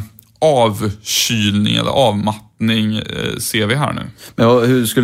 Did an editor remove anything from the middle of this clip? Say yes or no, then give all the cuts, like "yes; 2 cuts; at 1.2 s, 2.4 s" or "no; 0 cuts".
no; 0 cuts